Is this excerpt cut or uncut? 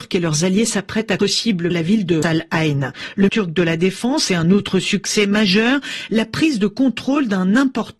cut